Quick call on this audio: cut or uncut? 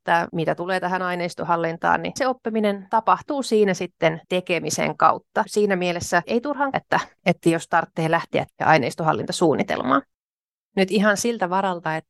cut